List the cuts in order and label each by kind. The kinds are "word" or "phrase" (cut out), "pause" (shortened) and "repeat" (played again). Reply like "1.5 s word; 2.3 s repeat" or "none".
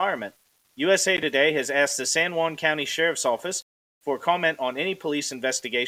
none